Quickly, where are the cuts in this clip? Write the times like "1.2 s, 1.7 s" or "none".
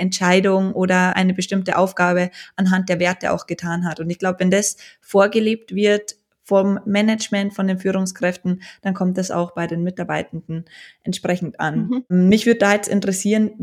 none